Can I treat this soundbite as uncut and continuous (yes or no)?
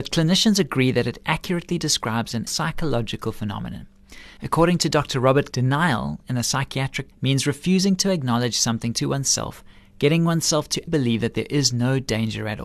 no